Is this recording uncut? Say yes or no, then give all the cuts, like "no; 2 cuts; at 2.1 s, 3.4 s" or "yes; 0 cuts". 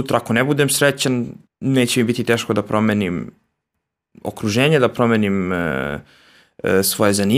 no; 1 cut; at 1.4 s